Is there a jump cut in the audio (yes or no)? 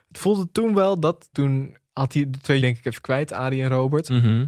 yes